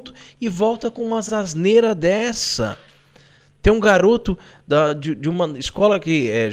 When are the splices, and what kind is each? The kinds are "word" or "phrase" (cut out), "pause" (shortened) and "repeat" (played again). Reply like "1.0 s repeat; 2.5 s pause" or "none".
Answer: none